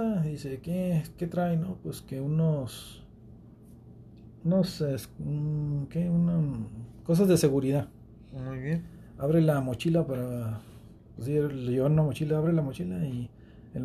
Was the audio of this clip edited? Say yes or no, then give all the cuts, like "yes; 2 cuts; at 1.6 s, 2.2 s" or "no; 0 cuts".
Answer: no; 0 cuts